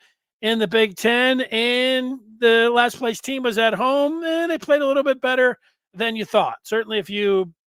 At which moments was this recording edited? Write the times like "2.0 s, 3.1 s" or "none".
none